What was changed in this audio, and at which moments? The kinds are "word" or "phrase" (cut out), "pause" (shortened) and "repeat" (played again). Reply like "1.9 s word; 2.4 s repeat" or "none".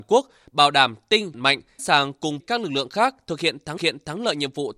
1.3 s word; 1.8 s word; 2.4 s word; 3.8 s repeat